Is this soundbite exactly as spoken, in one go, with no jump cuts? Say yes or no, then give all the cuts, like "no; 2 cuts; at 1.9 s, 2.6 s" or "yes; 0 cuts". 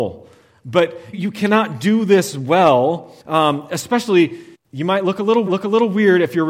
no; 4 cuts; at 1.1 s, 3.2 s, 4.5 s, 5.5 s